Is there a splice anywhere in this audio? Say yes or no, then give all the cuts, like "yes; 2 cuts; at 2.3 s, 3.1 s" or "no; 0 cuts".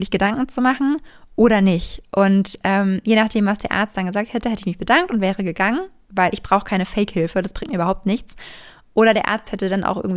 no; 0 cuts